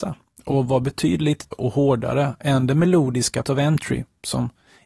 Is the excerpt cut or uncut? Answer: cut